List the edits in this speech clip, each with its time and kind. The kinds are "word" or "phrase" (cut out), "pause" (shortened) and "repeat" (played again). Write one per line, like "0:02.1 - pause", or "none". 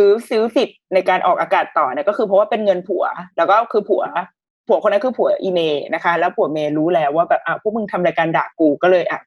none